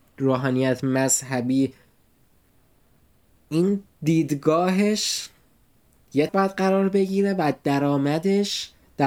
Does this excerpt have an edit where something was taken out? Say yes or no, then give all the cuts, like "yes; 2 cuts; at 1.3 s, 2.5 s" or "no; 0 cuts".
yes; 2 cuts; at 3.9 s, 6.3 s